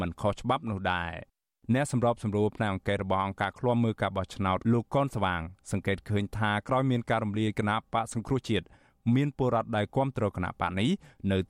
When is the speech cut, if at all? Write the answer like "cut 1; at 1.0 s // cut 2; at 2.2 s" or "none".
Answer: cut 1; at 4.6 s